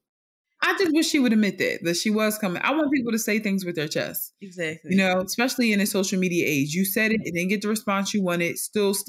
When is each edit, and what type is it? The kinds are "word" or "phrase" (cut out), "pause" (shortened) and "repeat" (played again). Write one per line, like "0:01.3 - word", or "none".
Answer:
none